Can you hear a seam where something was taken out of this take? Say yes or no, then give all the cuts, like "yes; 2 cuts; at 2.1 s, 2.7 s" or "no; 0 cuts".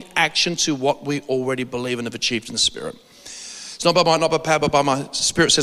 no; 0 cuts